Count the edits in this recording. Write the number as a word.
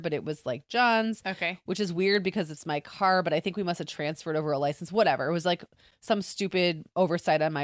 zero